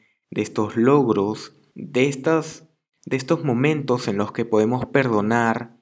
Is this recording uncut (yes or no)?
yes